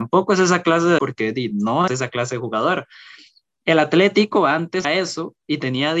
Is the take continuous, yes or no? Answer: no